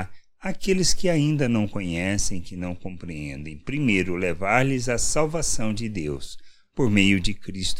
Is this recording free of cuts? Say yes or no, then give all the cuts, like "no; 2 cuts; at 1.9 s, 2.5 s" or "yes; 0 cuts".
yes; 0 cuts